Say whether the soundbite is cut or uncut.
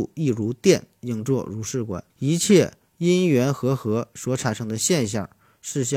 cut